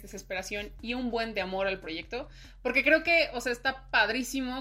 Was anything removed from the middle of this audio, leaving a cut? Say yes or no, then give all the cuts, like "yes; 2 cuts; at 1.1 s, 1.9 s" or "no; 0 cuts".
no; 0 cuts